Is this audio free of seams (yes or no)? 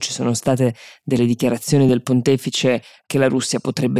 yes